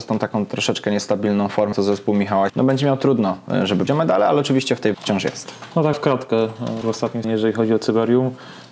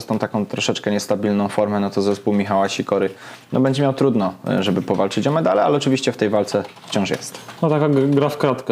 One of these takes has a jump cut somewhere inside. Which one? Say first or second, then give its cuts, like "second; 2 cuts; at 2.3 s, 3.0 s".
first; 7 cuts; at 1.7 s, 2.5 s, 3.9 s, 4.9 s, 5.9 s, 6.8 s, 7.2 s